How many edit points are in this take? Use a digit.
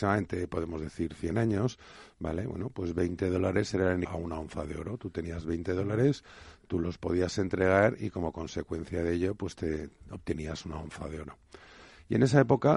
1